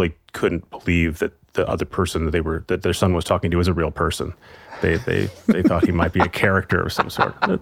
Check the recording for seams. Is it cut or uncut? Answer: uncut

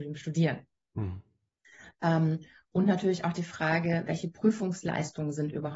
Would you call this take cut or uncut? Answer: uncut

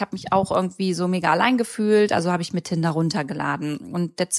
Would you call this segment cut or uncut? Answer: uncut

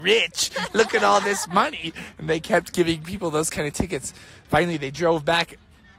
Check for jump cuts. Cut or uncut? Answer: uncut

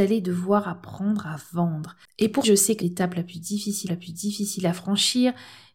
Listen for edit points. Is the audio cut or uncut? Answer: cut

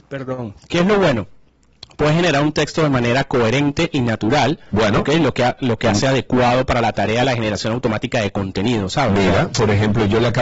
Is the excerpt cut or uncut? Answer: uncut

